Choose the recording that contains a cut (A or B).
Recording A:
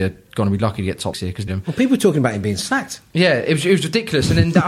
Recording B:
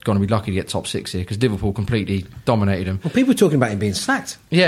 A